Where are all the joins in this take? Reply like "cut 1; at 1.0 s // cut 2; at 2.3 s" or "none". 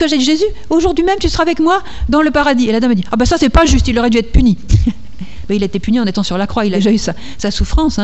none